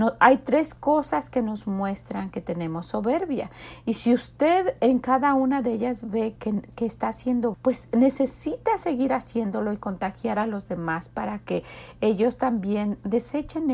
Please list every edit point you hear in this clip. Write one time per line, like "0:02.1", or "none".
0:06.4
0:07.5